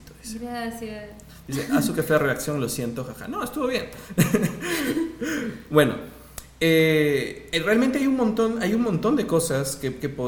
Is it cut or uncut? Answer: uncut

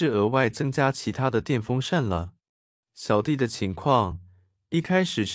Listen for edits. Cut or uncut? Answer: cut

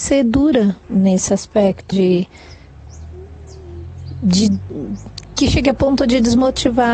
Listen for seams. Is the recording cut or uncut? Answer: cut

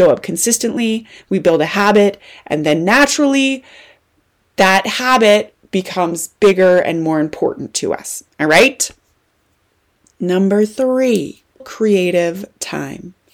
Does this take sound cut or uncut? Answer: cut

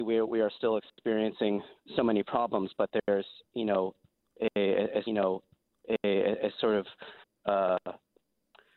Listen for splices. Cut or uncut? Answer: cut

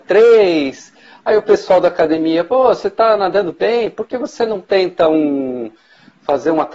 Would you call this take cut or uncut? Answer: uncut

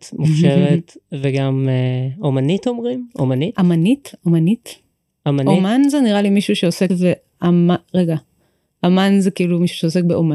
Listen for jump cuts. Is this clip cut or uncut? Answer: cut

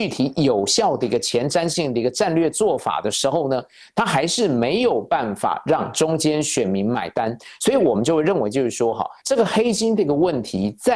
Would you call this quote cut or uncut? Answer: cut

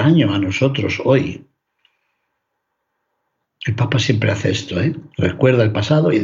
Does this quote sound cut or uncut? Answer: uncut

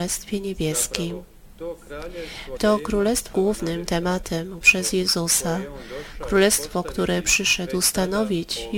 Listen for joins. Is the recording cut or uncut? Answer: cut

